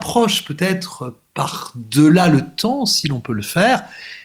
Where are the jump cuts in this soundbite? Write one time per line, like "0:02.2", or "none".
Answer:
none